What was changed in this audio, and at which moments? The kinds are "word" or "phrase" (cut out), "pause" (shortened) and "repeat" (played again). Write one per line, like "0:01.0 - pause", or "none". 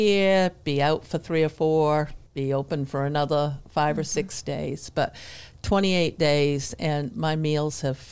0:02.3 - pause